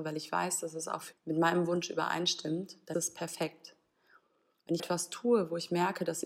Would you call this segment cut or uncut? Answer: cut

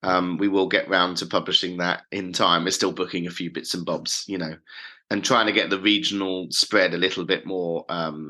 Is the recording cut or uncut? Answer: uncut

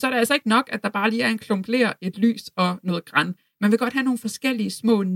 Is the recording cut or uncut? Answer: uncut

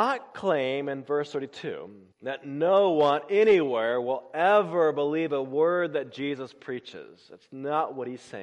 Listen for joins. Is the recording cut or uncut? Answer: cut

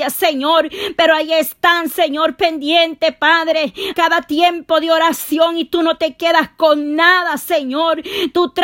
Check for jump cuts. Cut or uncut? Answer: cut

